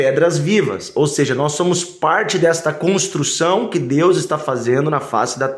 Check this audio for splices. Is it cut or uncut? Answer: uncut